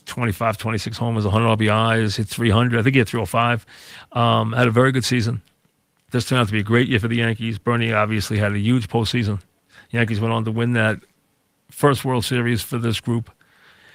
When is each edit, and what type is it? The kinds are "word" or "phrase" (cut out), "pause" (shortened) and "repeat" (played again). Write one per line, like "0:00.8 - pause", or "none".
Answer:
none